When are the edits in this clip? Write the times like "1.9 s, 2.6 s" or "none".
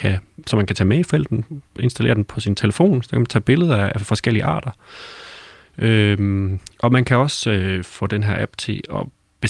none

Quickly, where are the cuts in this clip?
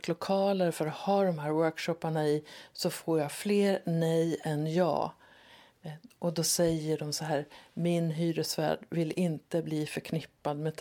none

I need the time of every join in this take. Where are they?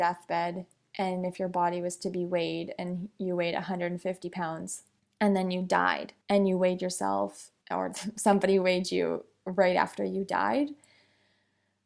5.0 s, 6.2 s, 7.6 s

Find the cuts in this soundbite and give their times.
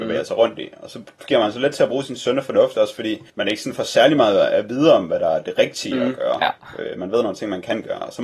3.3 s

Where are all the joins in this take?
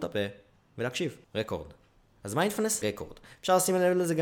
1.2 s, 2.8 s

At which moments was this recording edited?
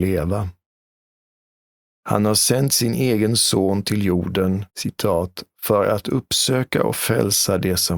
4.7 s

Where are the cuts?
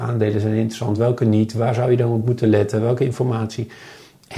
none

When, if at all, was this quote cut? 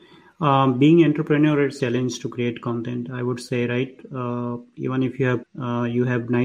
1.8 s, 5.4 s

